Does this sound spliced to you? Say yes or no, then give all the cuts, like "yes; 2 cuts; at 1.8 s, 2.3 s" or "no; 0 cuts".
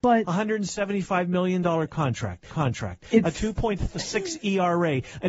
yes; 1 cut; at 2.5 s